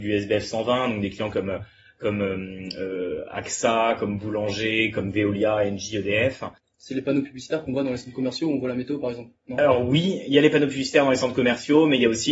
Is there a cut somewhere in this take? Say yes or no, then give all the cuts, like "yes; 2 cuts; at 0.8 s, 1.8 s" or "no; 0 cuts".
no; 0 cuts